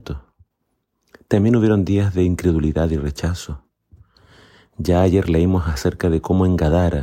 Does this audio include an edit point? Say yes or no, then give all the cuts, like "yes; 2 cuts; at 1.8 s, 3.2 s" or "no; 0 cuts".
no; 0 cuts